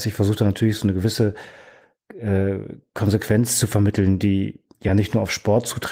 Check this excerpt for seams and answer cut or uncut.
uncut